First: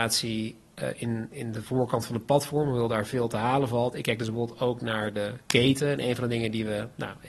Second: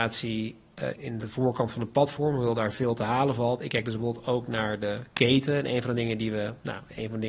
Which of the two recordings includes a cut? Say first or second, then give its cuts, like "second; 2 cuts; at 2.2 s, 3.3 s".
second; 1 cut; at 1.0 s